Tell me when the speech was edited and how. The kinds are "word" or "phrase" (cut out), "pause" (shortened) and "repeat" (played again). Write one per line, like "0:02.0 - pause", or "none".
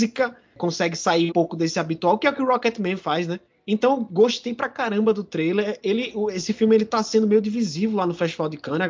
0:01.3 - word
0:03.4 - pause